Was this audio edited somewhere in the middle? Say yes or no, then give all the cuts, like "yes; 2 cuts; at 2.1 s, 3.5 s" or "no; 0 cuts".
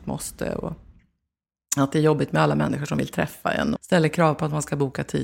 yes; 1 cut; at 3.8 s